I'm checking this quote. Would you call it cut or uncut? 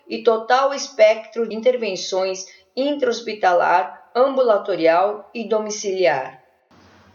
cut